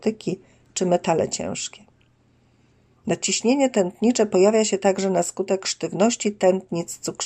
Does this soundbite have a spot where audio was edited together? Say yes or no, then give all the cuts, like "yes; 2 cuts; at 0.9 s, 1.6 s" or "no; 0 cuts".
no; 0 cuts